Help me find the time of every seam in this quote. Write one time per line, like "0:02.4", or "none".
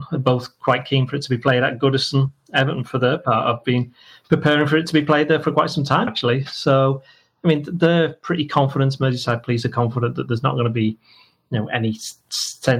0:06.1